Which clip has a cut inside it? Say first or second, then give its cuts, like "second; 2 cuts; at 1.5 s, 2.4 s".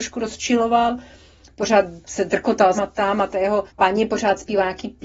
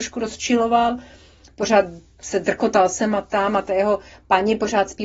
first; 3 cuts; at 2.0 s, 2.7 s, 3.7 s